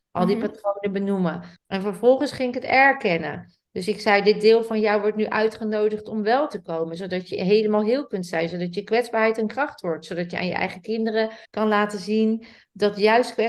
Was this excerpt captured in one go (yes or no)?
no